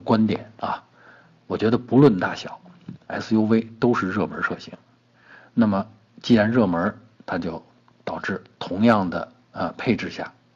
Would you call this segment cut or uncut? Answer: uncut